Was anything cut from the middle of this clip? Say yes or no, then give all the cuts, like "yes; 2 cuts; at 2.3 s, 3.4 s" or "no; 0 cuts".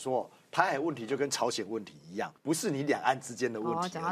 yes; 1 cut; at 2.4 s